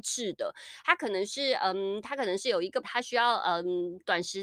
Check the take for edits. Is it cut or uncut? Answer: cut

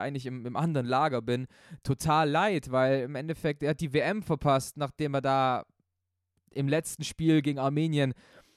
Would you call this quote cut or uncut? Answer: uncut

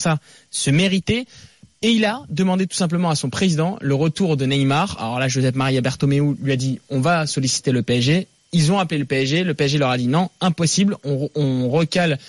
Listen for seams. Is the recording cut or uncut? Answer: uncut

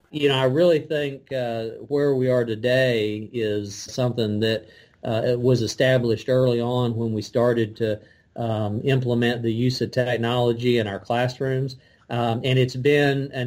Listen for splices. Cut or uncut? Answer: cut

